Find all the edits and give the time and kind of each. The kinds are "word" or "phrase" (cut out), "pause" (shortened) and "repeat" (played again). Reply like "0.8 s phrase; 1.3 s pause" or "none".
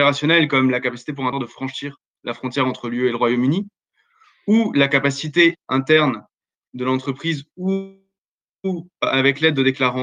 1.3 s word